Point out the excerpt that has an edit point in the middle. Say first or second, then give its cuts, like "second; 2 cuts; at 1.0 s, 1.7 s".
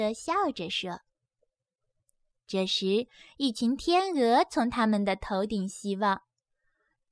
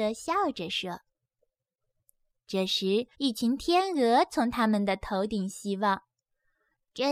second; 1 cut; at 3.1 s